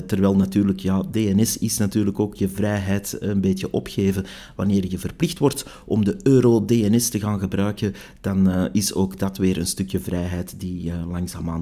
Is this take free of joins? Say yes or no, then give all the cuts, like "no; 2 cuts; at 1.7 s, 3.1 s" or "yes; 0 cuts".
yes; 0 cuts